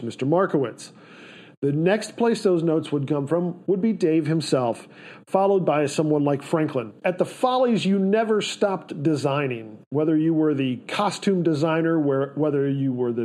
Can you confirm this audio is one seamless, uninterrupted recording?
yes; 0 cuts

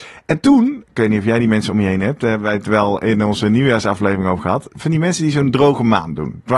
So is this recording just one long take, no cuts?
yes; 0 cuts

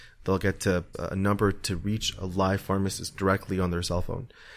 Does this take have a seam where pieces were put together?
yes; 1 cut; at 0.9 s

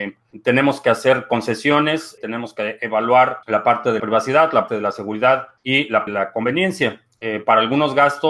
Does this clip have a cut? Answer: yes; 6 cuts; at 2.2 s, 3.4 s, 4.0 s, 4.7 s, 5.6 s, 6.1 s

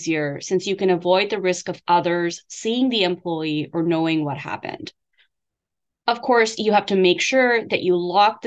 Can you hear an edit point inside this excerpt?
no; 0 cuts

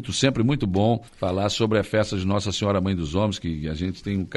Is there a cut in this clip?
yes; 1 cut; at 1.1 s

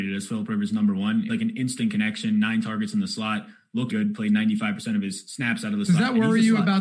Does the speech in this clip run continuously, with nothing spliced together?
no; 2 cuts; at 1.3 s, 3.9 s

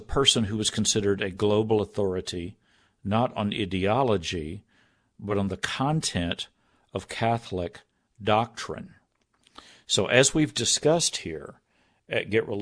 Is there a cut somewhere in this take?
no; 0 cuts

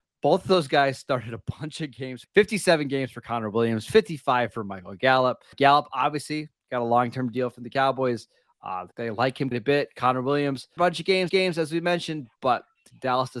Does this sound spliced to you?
yes; 6 cuts; at 2.2 s, 5.5 s, 8.9 s, 9.5 s, 10.8 s, 11.3 s

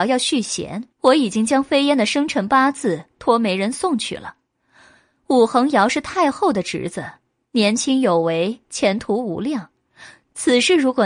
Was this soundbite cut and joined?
yes; 1 cut; at 0.9 s

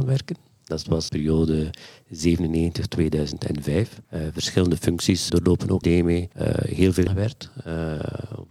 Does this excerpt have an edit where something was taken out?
yes; 7 cuts; at 1.1 s, 2.9 s, 4.0 s, 5.3 s, 5.8 s, 6.3 s, 7.1 s

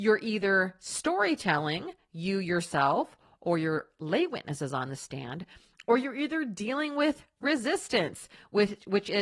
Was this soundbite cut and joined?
no; 0 cuts

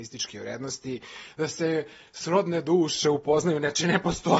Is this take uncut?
yes; 0 cuts

